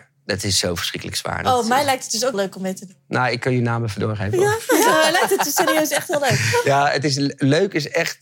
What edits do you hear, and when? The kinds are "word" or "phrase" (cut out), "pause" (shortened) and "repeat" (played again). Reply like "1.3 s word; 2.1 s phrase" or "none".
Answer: 2.3 s word